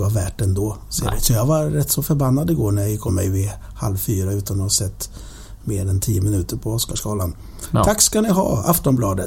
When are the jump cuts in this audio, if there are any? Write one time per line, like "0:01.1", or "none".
0:03.1

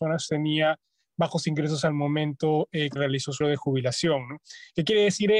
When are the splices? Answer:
0:03.0
0:03.4

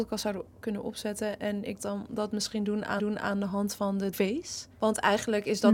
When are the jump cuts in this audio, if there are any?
0:01.8
0:03.0
0:04.1
0:04.7

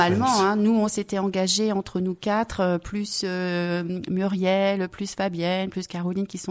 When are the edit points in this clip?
none

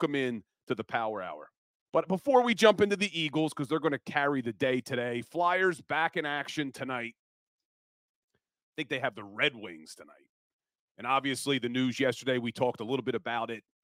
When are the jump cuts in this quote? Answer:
0:01.7

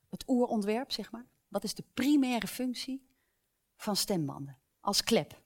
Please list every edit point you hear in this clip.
none

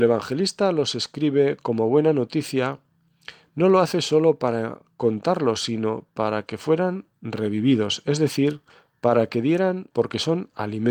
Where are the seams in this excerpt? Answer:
0:08.7
0:09.9

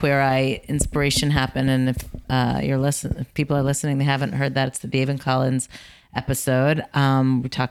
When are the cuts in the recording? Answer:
none

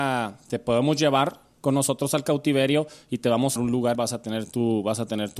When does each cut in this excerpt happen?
0:03.6
0:03.9

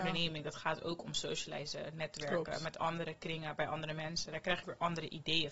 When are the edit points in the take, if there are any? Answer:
0:04.6

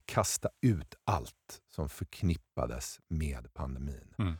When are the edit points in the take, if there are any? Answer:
none

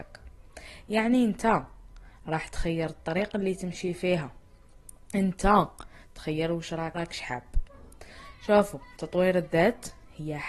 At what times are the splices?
0:06.9

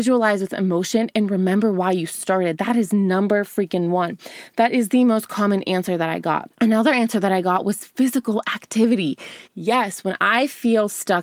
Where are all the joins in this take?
0:06.5
0:09.4

